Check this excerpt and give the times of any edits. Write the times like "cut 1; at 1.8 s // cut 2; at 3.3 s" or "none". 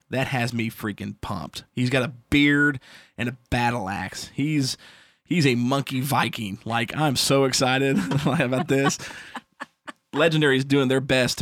none